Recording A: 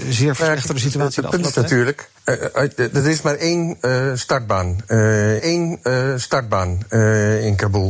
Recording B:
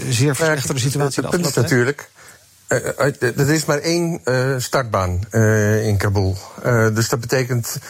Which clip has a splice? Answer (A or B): A